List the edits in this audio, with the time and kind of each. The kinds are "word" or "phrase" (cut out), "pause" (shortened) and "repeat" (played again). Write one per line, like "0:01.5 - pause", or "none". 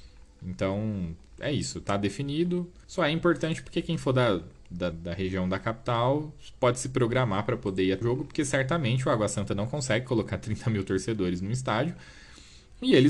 0:02.8 - pause
0:04.9 - word
0:08.0 - word